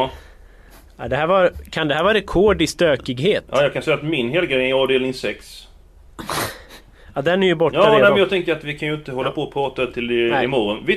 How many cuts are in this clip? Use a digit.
0